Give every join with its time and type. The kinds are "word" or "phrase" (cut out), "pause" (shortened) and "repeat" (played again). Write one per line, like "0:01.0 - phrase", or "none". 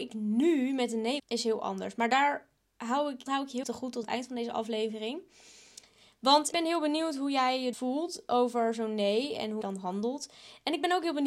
0:01.2 - word
0:03.3 - word
0:03.6 - word
0:04.0 - word
0:06.5 - word
0:07.7 - word
0:09.6 - word